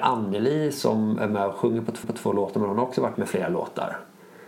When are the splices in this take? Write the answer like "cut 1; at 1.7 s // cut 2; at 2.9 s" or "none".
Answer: cut 1; at 2.0 s // cut 2; at 3.1 s